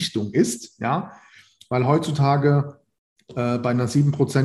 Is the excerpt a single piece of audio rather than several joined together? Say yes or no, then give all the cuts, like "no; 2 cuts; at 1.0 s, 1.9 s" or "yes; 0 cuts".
yes; 0 cuts